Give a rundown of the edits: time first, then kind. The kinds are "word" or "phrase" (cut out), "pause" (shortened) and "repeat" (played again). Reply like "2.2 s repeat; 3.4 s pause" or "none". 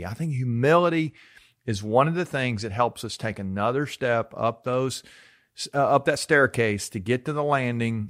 none